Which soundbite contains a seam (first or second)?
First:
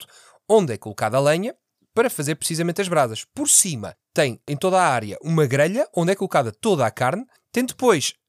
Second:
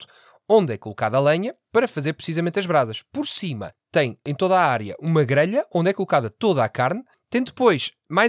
second